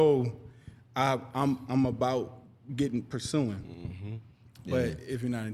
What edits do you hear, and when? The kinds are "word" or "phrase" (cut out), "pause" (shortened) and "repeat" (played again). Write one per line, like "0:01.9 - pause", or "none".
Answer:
none